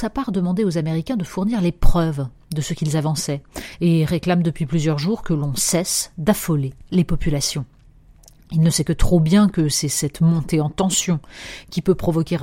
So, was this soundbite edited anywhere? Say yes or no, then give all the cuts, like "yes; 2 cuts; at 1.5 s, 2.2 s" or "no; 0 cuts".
no; 0 cuts